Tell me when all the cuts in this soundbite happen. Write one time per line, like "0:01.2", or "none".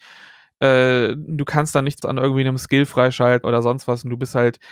0:02.0
0:03.4